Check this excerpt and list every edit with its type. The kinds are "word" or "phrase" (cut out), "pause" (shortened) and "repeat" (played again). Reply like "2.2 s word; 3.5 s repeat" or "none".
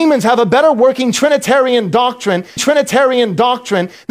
2.6 s repeat